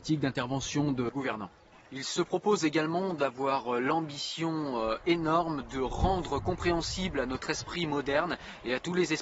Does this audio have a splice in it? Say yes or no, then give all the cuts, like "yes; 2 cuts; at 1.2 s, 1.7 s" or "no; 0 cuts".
no; 0 cuts